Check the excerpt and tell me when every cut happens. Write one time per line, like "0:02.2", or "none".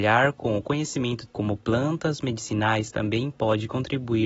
0:01.3